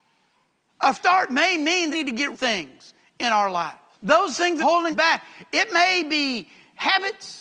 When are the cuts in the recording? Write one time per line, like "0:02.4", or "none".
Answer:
0:00.9
0:01.9
0:02.3
0:03.9
0:04.6
0:04.9